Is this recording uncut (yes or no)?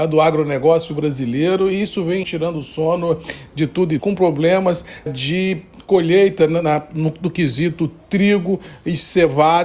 no